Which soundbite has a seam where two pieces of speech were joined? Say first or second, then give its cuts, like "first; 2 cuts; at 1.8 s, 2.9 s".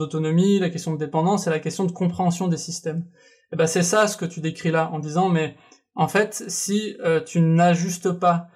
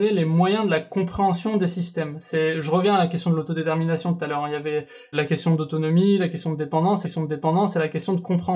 second; 2 cuts; at 5.1 s, 7.0 s